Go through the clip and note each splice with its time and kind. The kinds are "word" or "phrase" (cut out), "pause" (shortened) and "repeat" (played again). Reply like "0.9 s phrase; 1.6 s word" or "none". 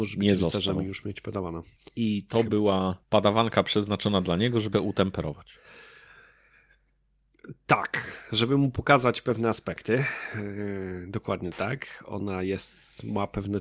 1.8 s pause; 3.0 s pause; 4.7 s phrase